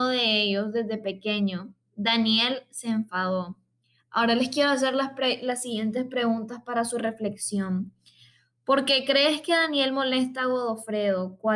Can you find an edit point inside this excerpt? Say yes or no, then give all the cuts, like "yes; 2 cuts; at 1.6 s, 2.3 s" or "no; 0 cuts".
no; 0 cuts